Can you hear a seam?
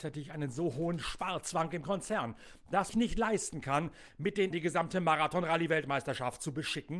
yes; 3 cuts; at 1.8 s, 2.9 s, 4.5 s

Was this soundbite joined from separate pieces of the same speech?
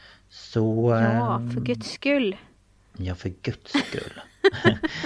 no; 0 cuts

